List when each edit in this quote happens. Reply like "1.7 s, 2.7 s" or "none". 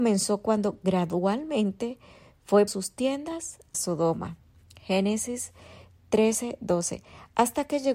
2.7 s, 3.7 s